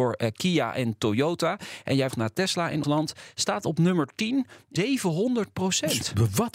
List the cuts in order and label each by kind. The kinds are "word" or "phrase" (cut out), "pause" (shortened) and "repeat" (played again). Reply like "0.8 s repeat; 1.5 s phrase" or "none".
2.1 s word; 2.8 s word; 4.8 s phrase